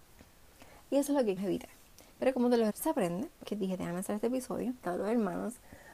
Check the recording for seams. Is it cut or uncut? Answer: cut